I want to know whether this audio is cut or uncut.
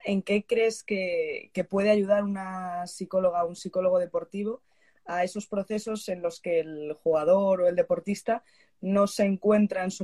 uncut